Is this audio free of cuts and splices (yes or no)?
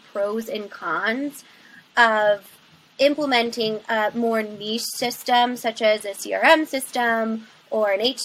yes